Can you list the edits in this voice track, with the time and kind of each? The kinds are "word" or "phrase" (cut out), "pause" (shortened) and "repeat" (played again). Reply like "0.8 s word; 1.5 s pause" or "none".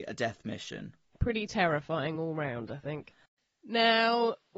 none

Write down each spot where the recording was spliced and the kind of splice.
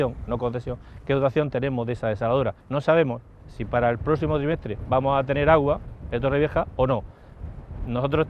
2.6 s pause

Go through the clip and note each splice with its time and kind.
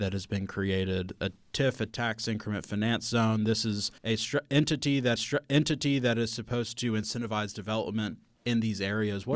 4.0 s pause; 5.2 s repeat

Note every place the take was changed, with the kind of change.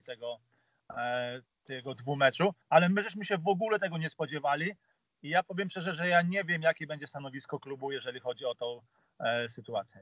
2.6 s pause

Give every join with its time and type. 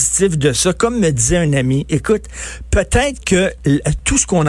none

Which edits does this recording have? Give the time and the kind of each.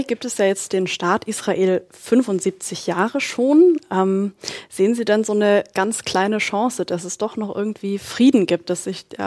none

